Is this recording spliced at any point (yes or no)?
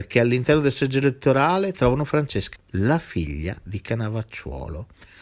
yes